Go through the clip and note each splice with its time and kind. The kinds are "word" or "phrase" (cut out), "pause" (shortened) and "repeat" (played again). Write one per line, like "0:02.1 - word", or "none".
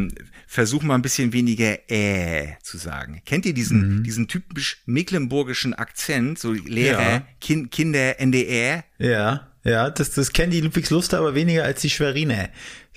0:08.9 - pause

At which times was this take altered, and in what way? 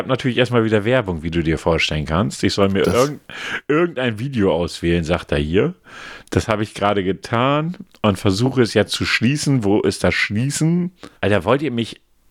0:02.8 - word
0:11.2 - pause

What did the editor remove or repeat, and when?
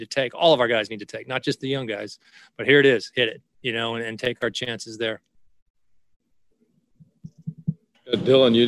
none

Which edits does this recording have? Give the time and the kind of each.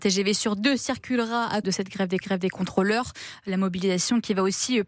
0:01.6 - phrase
0:02.2 - repeat

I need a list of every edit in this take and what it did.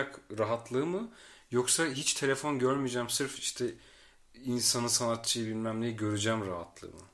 none

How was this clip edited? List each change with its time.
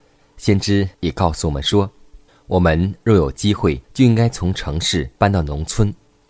0:00.9 - pause
0:02.3 - pause
0:03.8 - pause
0:05.2 - pause

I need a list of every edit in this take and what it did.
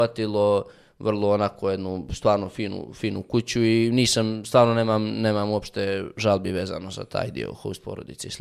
none

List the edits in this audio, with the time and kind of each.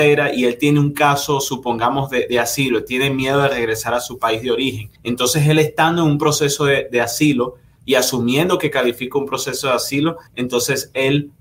0:05.0 - pause
0:10.3 - pause

